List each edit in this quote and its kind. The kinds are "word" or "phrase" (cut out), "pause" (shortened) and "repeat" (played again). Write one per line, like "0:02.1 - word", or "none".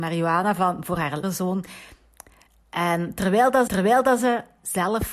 0:01.2 - word
0:03.7 - repeat